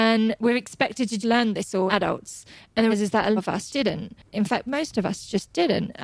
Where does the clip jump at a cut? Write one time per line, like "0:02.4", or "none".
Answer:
0:01.2
0:01.9
0:02.9
0:03.4
0:03.7
0:04.7

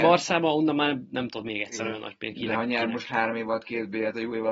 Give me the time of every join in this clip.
none

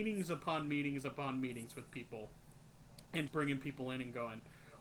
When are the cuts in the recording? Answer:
0:03.3

